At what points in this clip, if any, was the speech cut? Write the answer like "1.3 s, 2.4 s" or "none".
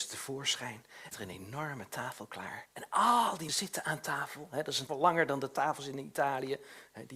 1.1 s, 2.7 s, 3.5 s, 4.9 s

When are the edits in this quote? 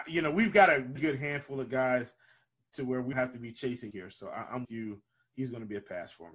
1.0 s, 3.1 s, 3.9 s, 4.6 s

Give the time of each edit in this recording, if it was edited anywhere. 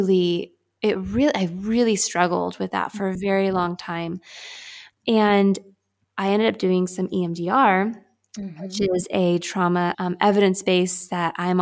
9.9 s

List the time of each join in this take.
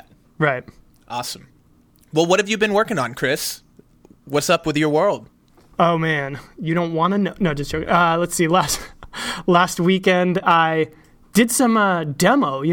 none

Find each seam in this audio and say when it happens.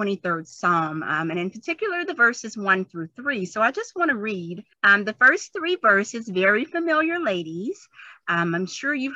4.7 s

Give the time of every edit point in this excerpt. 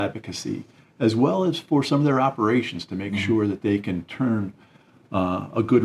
none

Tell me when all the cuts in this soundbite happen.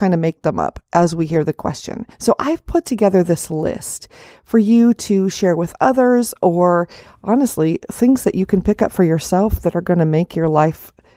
2.1 s

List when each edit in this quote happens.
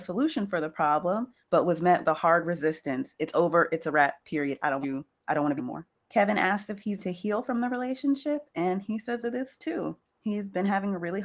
2.0 s, 4.8 s, 5.6 s, 7.0 s, 9.2 s

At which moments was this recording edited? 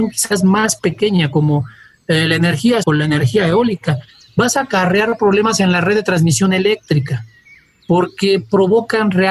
2.8 s

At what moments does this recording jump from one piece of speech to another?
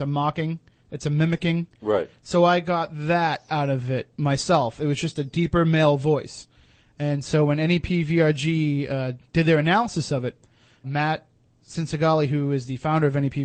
10.8 s

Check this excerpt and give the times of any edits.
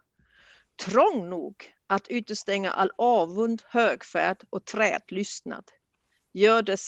none

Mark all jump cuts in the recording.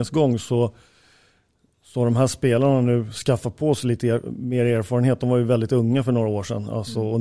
none

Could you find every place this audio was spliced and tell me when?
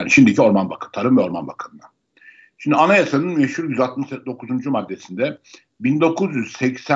none

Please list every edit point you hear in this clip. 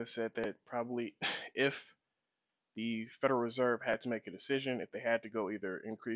none

